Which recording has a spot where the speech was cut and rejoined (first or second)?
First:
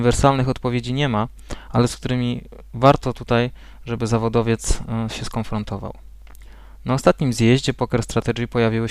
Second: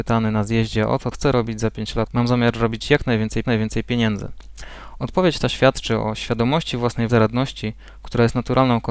second